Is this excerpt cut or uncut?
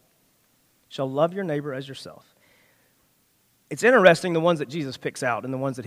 uncut